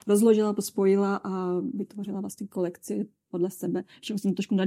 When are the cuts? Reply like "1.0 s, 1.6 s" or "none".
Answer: none